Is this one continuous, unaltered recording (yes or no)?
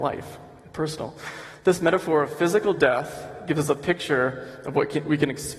yes